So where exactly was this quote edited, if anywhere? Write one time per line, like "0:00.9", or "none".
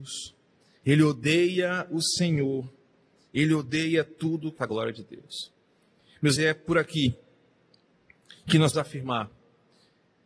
0:04.6
0:06.4
0:08.7